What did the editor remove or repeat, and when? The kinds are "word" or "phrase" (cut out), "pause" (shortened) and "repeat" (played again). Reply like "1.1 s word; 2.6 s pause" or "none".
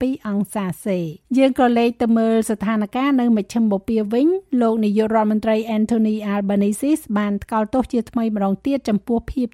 1.2 s pause

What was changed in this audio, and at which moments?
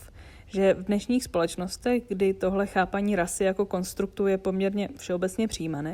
none

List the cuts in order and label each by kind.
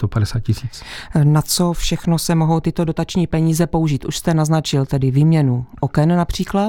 none

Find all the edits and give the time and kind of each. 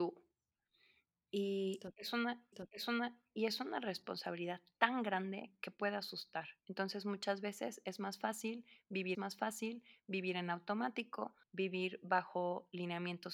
2.5 s repeat; 6.6 s pause; 9.1 s repeat; 11.4 s pause

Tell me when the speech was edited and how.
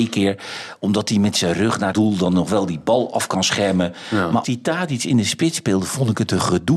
1.9 s word; 4.4 s word

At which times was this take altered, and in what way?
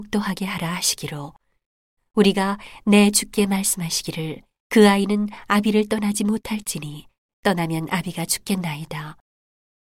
4.5 s pause

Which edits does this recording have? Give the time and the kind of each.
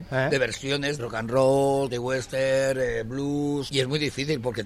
1.0 s word; 1.9 s word; 3.7 s word

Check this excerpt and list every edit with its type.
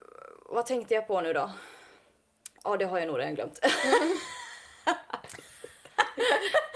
2.6 s pause

